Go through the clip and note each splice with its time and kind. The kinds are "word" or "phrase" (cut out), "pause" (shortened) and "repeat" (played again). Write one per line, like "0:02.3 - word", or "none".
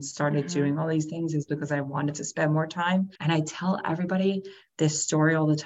0:03.2 - pause